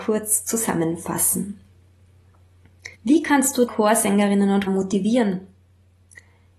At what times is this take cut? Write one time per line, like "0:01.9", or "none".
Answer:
0:02.9
0:03.7
0:04.7